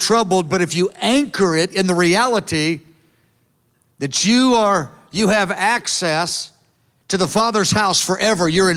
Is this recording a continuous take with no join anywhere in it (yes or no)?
yes